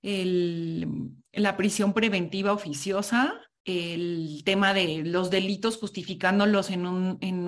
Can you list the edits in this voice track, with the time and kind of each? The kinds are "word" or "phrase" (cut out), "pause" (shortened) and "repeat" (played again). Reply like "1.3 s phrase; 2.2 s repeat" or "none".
3.6 s pause